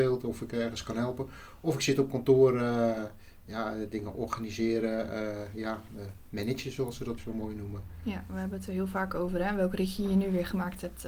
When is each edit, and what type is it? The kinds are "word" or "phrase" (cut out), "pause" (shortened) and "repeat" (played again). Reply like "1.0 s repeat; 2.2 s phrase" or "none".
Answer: 7.2 s word